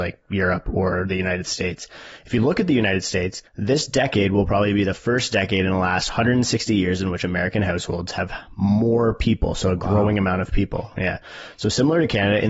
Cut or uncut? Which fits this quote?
cut